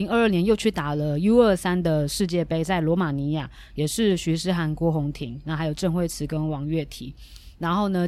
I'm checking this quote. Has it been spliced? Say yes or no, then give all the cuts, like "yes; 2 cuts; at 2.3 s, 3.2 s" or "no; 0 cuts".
no; 0 cuts